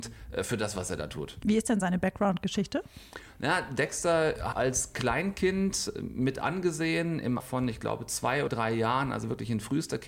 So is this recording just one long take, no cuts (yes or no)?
no